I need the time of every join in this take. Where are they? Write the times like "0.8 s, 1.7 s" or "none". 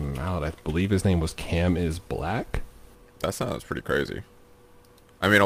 none